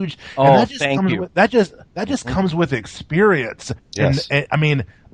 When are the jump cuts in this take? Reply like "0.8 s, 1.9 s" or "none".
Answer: none

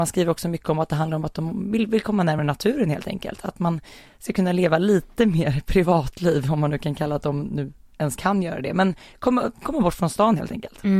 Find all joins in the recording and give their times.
none

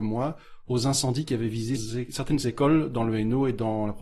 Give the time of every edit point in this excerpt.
1.8 s

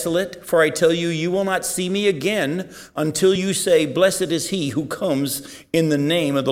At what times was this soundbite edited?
none

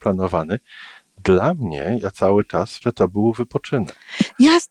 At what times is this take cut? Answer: 2.8 s

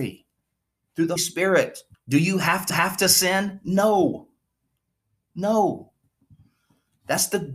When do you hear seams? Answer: 1.2 s, 1.9 s, 2.7 s

